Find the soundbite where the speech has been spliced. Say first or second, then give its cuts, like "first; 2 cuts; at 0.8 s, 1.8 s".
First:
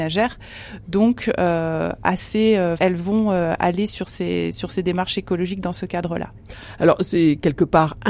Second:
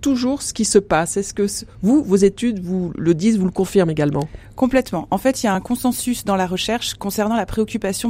first; 1 cut; at 2.8 s